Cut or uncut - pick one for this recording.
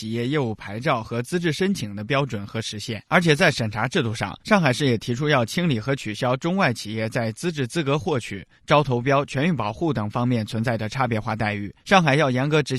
cut